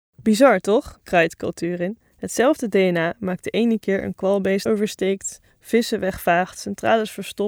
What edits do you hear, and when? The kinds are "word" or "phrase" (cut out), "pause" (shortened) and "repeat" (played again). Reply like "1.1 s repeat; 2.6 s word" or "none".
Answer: 4.7 s phrase